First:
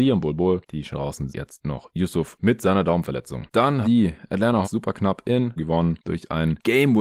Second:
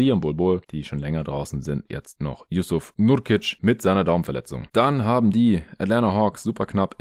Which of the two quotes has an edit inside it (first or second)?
first